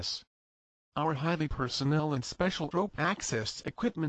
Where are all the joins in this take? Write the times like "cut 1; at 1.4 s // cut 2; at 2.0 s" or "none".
cut 1; at 1.5 s // cut 2; at 2.7 s